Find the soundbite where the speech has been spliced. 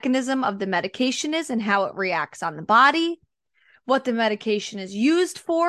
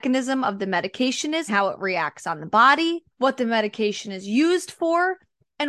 second; 2 cuts; at 1.5 s, 3.1 s

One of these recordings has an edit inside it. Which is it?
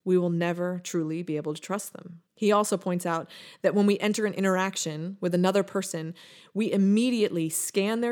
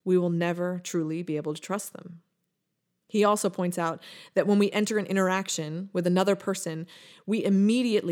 first; 1 cut; at 2.3 s

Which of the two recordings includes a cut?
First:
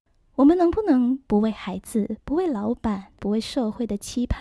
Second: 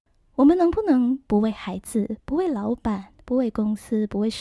first; 1 cut; at 3.2 s

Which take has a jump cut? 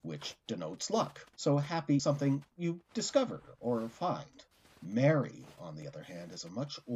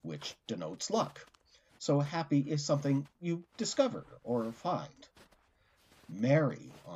first; 3 cuts; at 1.3 s, 2.0 s, 4.5 s

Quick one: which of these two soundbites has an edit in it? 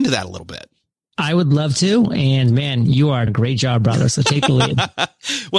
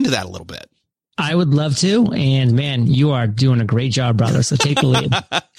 first; 1 cut; at 3.3 s

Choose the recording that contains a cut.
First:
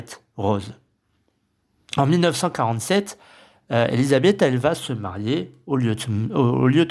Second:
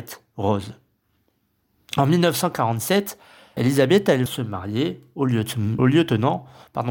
second; 3 cuts; at 3.6 s, 4.3 s, 5.8 s

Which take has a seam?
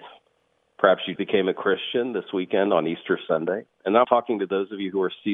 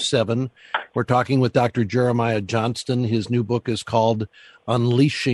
first; 2 cuts; at 1.2 s, 4.0 s

